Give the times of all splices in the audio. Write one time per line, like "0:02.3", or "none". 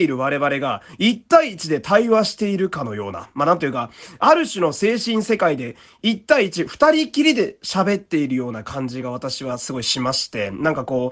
none